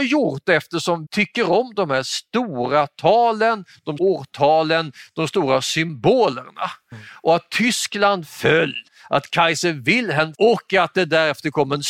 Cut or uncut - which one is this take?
cut